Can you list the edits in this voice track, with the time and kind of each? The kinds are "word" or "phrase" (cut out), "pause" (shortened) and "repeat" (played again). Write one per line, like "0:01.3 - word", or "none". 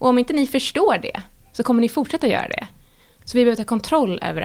none